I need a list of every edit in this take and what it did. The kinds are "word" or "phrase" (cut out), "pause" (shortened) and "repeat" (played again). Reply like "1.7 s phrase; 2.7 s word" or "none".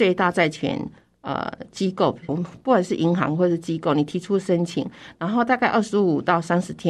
2.3 s word